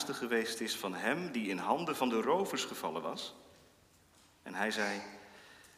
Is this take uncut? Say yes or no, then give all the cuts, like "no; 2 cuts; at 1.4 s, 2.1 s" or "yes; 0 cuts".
yes; 0 cuts